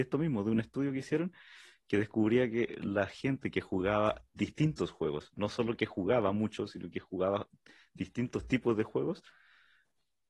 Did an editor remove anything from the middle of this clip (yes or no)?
no